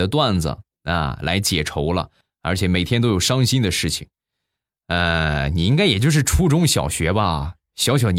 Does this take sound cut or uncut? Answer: uncut